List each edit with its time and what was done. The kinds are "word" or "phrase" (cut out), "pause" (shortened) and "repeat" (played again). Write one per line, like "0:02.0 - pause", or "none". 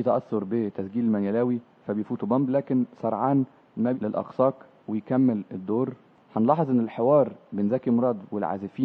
0:03.9 - word

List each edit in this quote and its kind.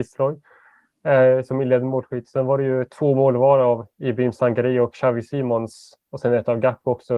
none

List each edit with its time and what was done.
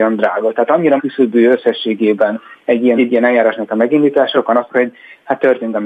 0:01.0 - word
0:03.0 - phrase
0:04.3 - word
0:04.7 - word

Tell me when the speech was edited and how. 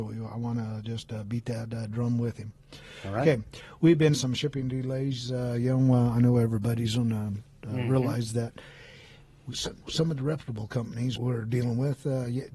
0:04.1 - word
0:09.8 - word
0:11.2 - word

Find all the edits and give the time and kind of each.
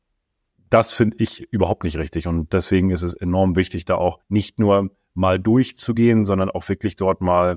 0:04.2 - pause

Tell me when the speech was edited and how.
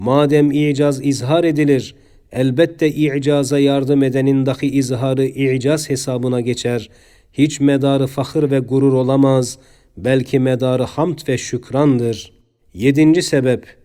none

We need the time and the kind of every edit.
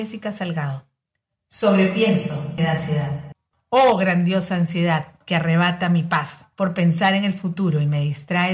0:02.6 - phrase
0:03.5 - pause
0:06.5 - pause

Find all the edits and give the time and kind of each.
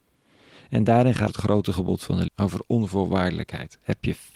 0:01.3 - phrase
0:02.3 - word

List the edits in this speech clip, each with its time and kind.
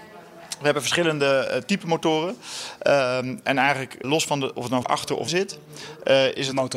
0:04.0 - word
0:04.8 - word
0:05.3 - word

